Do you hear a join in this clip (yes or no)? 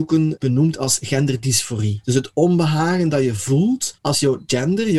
no